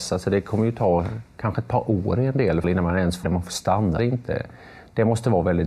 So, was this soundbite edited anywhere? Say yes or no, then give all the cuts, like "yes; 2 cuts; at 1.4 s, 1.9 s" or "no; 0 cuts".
yes; 3 cuts; at 2.6 s, 3.2 s, 4.0 s